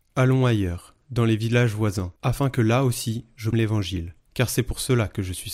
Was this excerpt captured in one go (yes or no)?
no